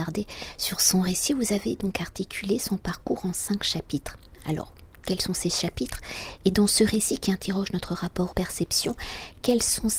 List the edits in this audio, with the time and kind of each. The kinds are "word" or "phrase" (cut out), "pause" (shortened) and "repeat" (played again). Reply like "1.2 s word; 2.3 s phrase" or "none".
8.3 s phrase